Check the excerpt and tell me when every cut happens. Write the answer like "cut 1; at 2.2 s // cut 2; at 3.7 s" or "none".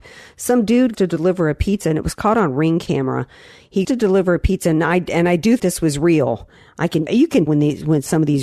cut 1; at 0.9 s // cut 2; at 3.8 s // cut 3; at 5.6 s // cut 4; at 7.1 s // cut 5; at 7.5 s